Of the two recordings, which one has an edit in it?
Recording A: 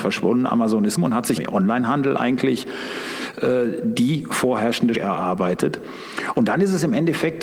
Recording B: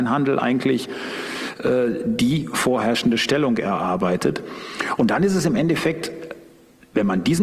A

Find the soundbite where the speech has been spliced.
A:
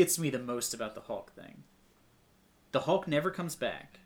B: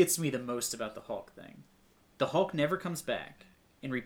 B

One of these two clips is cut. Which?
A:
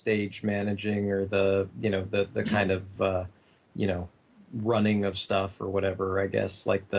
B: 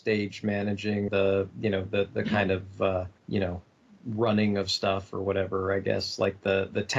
B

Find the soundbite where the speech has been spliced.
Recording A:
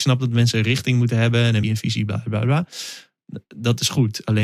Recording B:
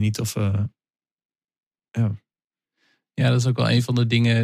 A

